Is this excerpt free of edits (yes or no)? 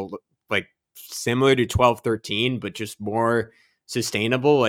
yes